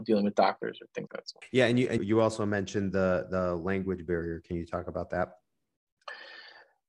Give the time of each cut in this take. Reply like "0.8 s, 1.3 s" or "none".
1.1 s, 2.0 s